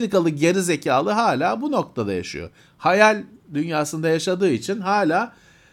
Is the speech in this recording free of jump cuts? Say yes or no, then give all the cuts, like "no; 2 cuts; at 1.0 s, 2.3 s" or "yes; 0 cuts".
yes; 0 cuts